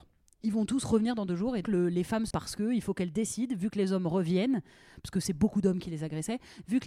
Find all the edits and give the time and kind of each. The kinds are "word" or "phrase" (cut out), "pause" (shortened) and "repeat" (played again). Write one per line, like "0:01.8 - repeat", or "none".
0:01.6 - word
0:02.3 - word

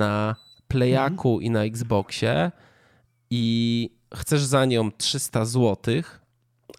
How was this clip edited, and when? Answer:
none

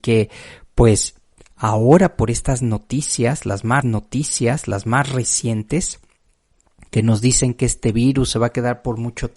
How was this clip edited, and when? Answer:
0:01.4 - pause
0:03.8 - repeat

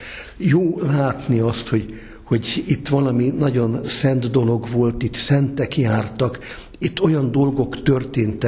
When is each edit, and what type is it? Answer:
none

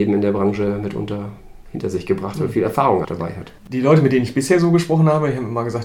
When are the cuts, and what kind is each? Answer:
0:03.0 - word
0:03.6 - pause

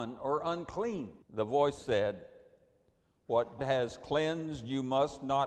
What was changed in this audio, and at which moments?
0:01.2 - pause
0:01.8 - word
0:03.6 - word

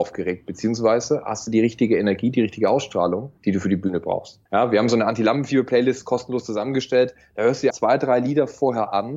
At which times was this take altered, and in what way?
0:03.4 - pause
0:04.5 - pause
0:07.7 - word

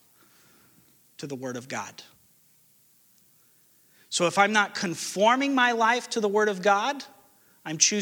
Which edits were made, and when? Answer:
none

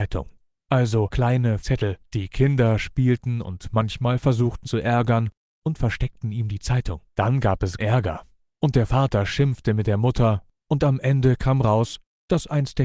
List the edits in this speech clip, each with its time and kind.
0:01.6 - word
0:02.0 - pause
0:04.6 - phrase
0:07.1 - pause
0:07.8 - word

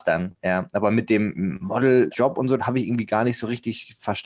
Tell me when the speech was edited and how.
0:02.1 - word
0:02.6 - word

